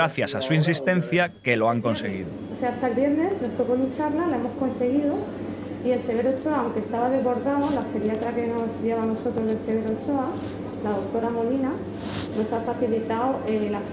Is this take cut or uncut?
uncut